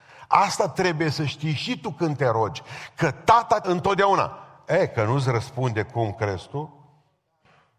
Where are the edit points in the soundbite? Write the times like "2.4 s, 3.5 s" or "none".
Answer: 3.6 s